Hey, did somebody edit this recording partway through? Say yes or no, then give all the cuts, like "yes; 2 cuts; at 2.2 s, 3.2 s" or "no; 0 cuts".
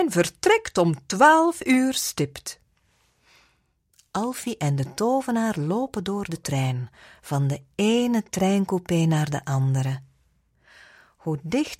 no; 0 cuts